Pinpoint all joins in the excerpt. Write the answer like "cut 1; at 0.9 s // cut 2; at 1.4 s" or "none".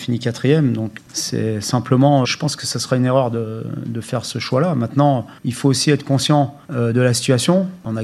cut 1; at 2.2 s // cut 2; at 5.4 s